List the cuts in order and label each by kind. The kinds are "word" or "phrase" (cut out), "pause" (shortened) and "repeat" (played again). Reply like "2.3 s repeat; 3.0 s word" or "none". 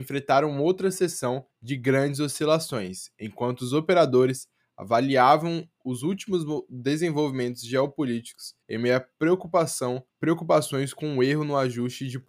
1.5 s pause; 8.6 s pause; 10.1 s pause

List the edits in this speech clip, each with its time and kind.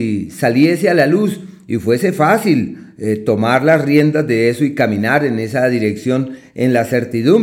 none

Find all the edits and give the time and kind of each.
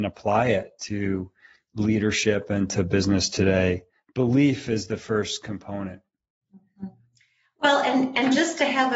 none

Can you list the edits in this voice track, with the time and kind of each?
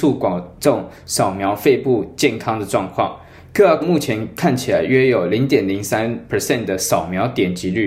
3.8 s word

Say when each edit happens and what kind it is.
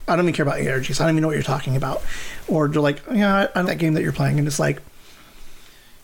3.6 s word

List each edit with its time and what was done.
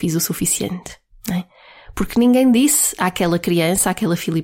1.1 s pause

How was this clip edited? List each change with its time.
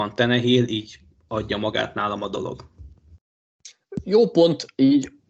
none

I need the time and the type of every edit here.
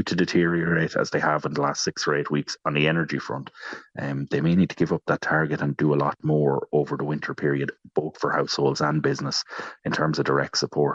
none

